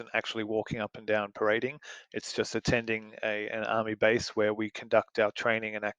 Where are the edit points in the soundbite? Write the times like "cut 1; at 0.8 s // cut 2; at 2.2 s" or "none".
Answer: none